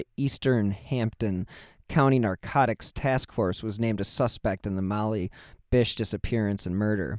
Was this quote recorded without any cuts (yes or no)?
yes